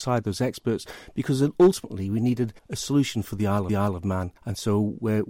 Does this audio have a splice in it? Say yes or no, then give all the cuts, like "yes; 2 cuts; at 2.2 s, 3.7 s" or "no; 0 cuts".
yes; 3 cuts; at 2.6 s, 3.7 s, 4.4 s